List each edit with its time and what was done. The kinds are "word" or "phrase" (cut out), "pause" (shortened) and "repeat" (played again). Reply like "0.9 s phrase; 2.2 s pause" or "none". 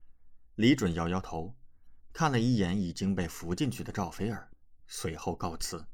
4.8 s phrase

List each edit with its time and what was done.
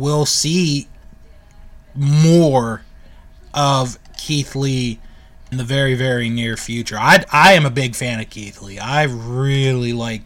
5.5 s word; 7.2 s word

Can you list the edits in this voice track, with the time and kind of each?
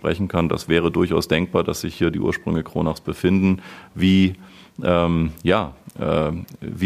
none

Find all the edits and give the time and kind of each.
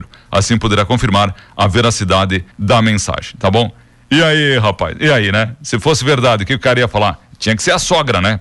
2.5 s pause

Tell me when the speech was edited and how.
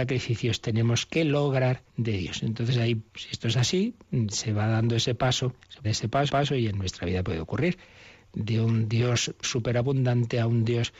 1.9 s pause; 3.1 s pause; 5.8 s phrase; 6.3 s repeat; 7.2 s word; 9.4 s word

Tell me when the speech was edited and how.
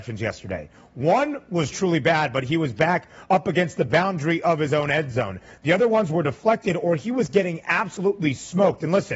1.7 s word

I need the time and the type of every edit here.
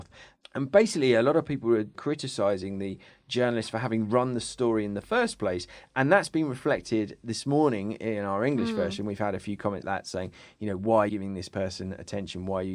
1.9 s word; 9.8 s word; 11.1 s word

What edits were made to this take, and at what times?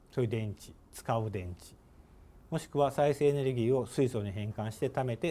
none

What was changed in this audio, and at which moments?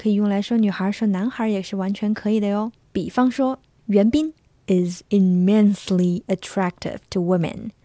none

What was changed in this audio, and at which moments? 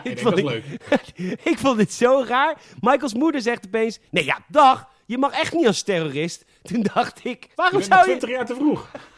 4.1 s pause; 7.5 s pause

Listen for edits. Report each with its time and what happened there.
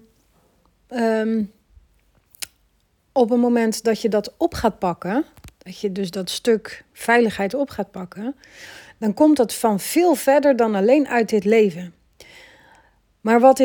none

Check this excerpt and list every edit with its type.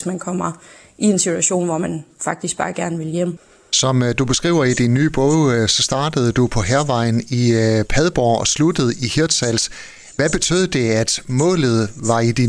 none

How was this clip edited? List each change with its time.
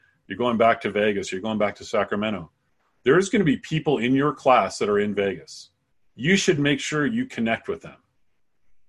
none

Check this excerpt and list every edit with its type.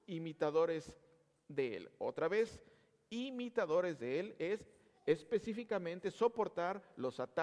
none

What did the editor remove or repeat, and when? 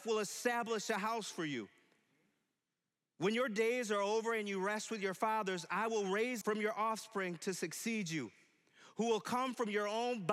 6.4 s word

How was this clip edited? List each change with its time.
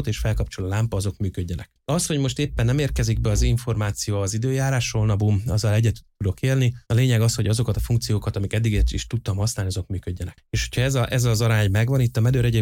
6.8 s pause

